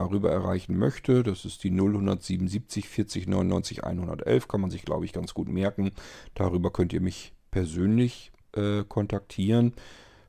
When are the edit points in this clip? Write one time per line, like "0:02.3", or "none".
0:08.4